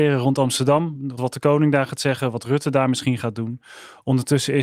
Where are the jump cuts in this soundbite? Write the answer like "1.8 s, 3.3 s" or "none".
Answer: 1.2 s